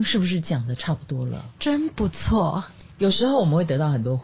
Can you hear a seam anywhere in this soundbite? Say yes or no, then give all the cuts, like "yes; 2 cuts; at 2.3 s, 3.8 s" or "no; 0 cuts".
yes; 2 cuts; at 1.5 s, 2.9 s